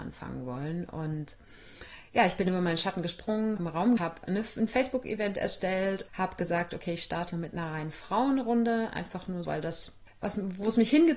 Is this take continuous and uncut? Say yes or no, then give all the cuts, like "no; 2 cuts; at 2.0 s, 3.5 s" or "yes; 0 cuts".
no; 5 cuts; at 3.6 s, 4.0 s, 6.1 s, 7.3 s, 9.4 s